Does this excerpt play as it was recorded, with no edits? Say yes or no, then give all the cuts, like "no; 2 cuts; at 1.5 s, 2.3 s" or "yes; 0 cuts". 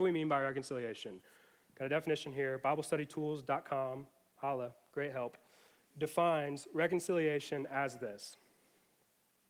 yes; 0 cuts